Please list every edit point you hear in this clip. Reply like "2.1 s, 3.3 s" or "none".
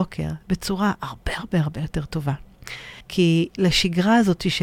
3.0 s